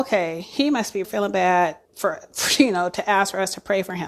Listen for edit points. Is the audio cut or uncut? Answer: cut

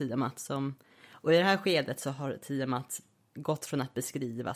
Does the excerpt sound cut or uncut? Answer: uncut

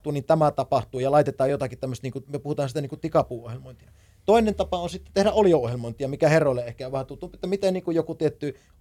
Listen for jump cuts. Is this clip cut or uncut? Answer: uncut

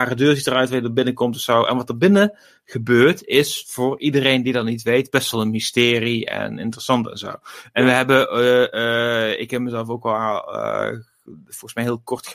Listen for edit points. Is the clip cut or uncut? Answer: uncut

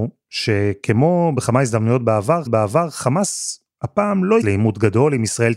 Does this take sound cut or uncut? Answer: cut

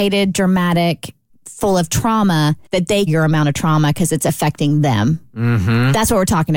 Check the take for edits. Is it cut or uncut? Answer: cut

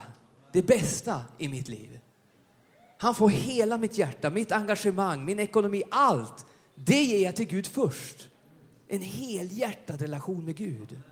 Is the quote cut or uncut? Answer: uncut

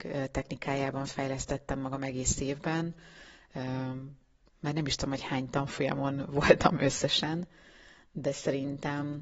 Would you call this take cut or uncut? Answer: uncut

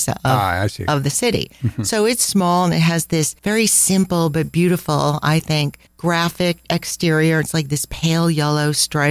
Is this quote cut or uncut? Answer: cut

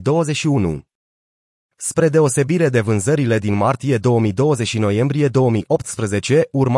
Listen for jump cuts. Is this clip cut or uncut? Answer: uncut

